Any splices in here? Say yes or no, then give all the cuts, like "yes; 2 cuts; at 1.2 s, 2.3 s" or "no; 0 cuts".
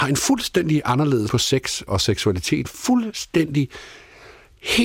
yes; 3 cuts; at 1.3 s, 1.9 s, 2.6 s